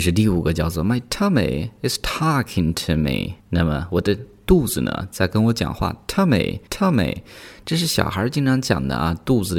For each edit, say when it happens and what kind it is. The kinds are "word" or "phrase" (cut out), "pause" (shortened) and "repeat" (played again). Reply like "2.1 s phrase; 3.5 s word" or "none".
3.4 s pause; 6.7 s pause